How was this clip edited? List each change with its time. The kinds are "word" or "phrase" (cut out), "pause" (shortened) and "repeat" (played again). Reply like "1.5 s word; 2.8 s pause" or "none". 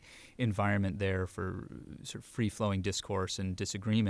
none